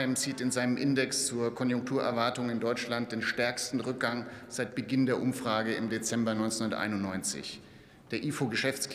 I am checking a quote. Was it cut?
no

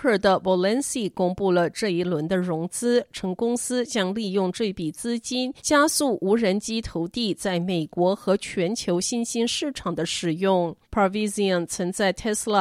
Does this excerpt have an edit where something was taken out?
yes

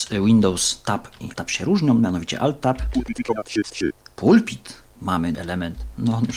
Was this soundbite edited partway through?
yes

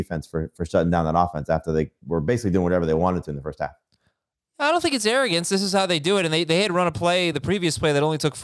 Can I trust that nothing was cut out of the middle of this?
yes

